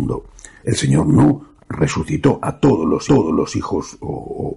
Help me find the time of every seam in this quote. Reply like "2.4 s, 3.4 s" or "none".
3.1 s